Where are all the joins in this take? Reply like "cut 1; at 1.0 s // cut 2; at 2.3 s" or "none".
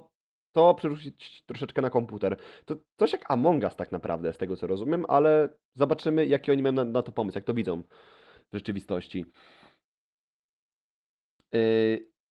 none